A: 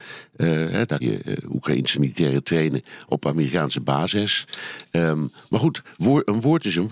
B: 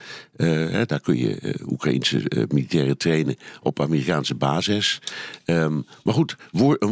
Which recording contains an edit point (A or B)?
A